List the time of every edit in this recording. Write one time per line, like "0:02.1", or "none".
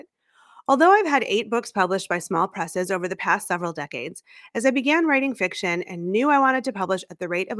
none

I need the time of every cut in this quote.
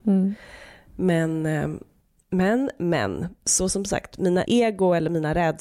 0:02.0
0:04.5

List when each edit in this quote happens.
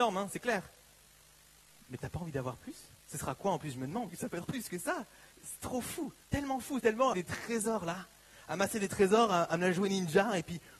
0:03.0
0:04.1
0:04.4
0:05.3
0:06.2
0:06.8
0:07.1

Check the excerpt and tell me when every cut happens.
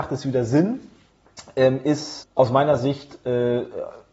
0:02.2

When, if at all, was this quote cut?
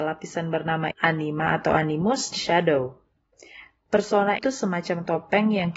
0:00.9
0:02.3
0:04.4

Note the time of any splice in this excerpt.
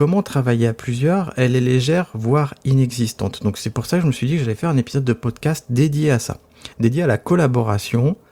0:06.7

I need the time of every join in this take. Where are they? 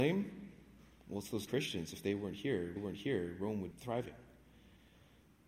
0:01.5
0:02.8
0:03.7

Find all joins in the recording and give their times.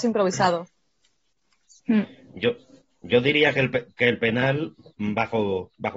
none

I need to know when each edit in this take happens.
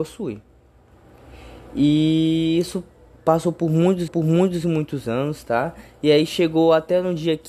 0:04.1

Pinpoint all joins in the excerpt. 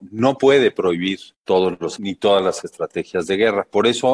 0:01.3
0:02.0

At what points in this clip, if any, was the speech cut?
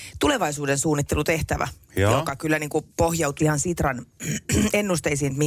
0:03.4

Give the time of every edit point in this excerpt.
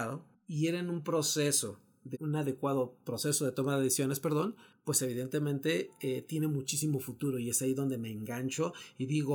0:02.1

